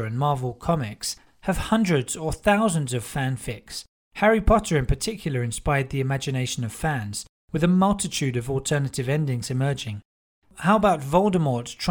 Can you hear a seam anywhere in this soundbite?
no; 0 cuts

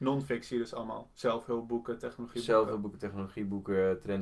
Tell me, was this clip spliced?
no; 0 cuts

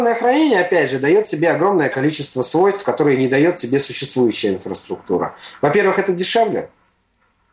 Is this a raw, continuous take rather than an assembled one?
yes; 0 cuts

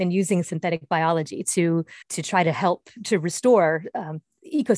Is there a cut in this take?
yes; 1 cut; at 2.0 s

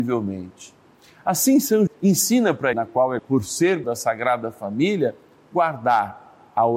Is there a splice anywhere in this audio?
yes; 5 cuts; at 0.9 s, 1.9 s, 2.7 s, 3.2 s, 3.8 s

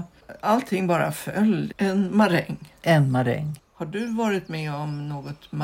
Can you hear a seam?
yes; 1 cut; at 3.7 s

